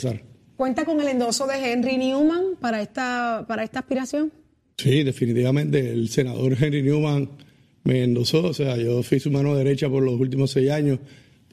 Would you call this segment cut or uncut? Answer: uncut